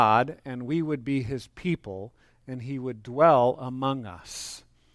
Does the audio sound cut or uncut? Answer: uncut